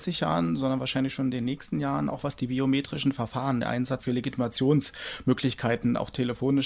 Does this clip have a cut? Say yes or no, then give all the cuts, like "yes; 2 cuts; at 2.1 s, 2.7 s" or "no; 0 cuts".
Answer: yes; 1 cut; at 4.0 s